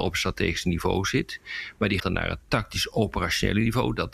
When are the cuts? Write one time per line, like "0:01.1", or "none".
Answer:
0:02.0